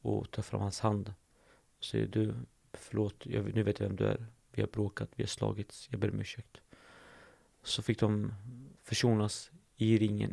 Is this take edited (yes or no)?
yes